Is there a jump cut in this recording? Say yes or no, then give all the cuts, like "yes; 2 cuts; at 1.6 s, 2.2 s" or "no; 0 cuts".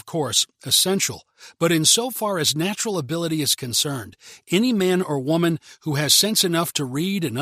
no; 0 cuts